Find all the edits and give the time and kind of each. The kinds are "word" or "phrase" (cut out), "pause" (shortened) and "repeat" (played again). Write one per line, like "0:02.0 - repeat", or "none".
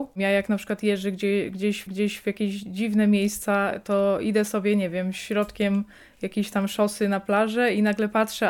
0:01.9 - repeat